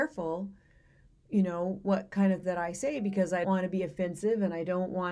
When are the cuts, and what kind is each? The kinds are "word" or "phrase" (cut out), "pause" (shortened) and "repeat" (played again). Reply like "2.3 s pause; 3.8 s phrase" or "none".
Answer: 2.4 s word; 3.4 s word